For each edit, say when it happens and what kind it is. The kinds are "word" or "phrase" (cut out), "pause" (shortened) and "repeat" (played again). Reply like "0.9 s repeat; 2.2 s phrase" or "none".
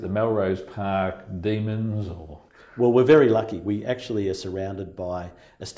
none

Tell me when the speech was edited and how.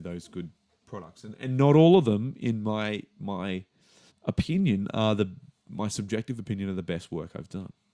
4.1 s pause

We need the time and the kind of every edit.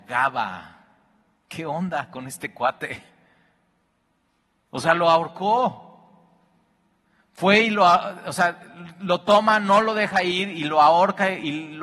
none

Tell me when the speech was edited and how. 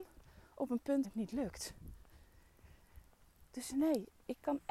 1.0 s word

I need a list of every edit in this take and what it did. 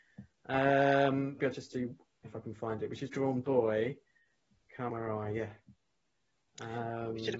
1.4 s word; 2.2 s word; 3.1 s word; 4.9 s word

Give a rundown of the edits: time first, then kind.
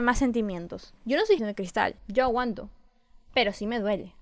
1.0 s pause; 1.4 s word; 2.0 s pause

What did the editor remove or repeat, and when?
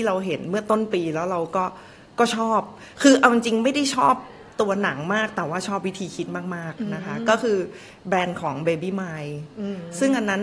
none

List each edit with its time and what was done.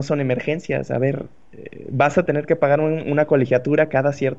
none

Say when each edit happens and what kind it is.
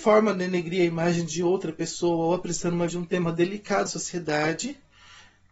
2.9 s word; 3.9 s word

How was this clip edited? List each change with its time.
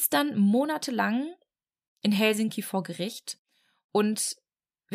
none

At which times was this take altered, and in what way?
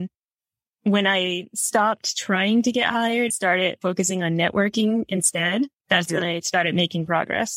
3.3 s word

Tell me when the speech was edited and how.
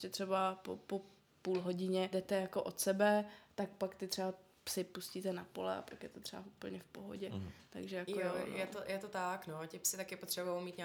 1.2 s pause; 2.1 s word

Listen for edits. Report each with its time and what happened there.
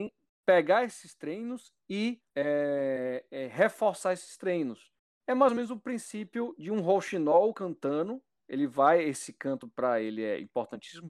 2.3 s pause; 5.0 s pause

